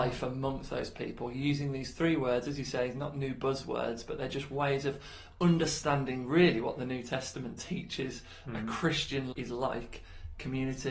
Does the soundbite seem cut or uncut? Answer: cut